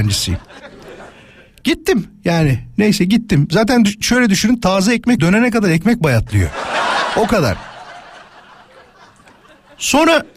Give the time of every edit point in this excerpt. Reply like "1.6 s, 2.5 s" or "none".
5.2 s